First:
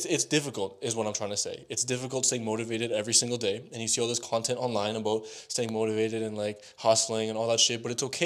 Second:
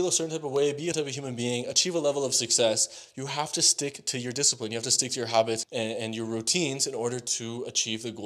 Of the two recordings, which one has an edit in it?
second; 2 cuts; at 0.9 s, 5.6 s

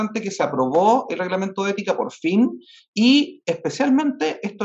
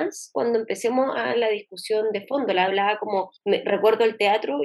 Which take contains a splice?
second; 3 cuts; at 1.3 s, 2.7 s, 3.4 s

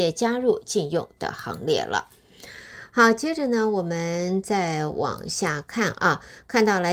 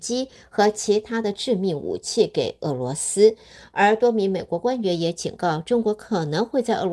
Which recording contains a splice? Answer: first; 1 cut; at 1.2 s

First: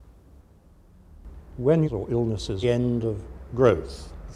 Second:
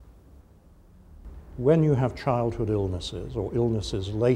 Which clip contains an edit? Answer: first; 2 cuts; at 1.8 s, 2.6 s

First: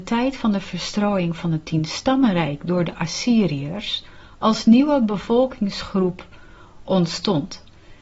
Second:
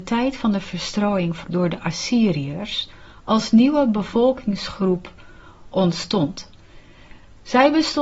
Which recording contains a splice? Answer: second; 1 cut; at 1.4 s

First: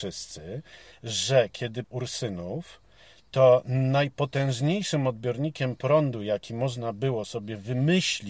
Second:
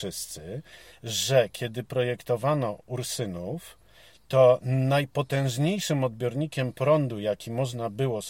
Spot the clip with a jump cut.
first; 1 cut; at 1.8 s

